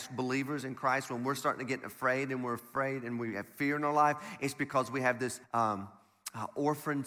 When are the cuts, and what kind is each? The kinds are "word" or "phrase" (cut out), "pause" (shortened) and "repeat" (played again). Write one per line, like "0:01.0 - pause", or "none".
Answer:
0:05.4 - pause

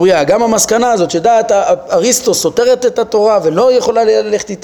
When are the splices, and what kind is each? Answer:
none

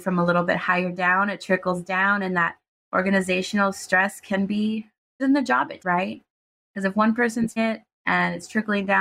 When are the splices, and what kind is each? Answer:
0:05.2 - word
0:05.8 - word
0:07.6 - word

